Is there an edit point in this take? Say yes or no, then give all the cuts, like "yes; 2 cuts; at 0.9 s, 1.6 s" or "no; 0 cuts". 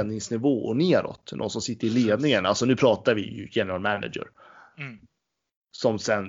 no; 0 cuts